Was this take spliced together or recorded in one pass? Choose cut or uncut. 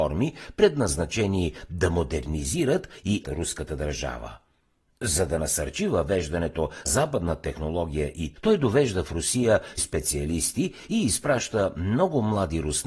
cut